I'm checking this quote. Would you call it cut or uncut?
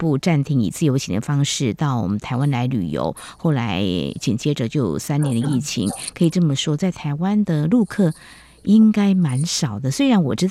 uncut